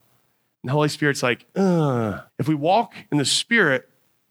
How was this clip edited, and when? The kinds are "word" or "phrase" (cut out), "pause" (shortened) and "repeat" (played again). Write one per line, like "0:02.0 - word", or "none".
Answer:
0:02.3 - pause